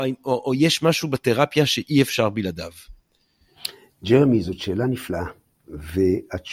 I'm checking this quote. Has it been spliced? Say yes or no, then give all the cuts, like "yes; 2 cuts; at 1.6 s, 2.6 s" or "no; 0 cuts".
no; 0 cuts